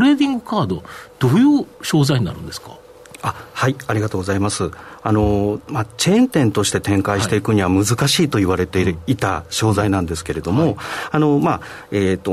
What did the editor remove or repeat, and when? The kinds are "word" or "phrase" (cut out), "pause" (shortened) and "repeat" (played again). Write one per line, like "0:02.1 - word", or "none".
0:01.7 - pause